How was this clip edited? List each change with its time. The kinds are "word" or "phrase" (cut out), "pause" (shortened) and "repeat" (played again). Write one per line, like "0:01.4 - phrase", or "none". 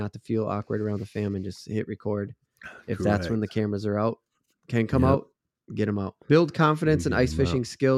0:06.2 - pause